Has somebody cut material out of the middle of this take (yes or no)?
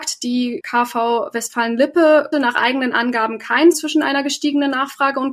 yes